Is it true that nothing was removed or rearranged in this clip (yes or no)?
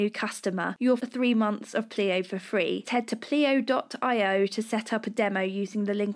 no